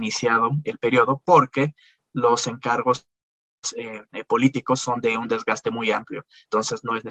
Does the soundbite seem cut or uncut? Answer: uncut